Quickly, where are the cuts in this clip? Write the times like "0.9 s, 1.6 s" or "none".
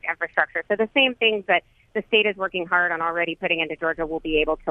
none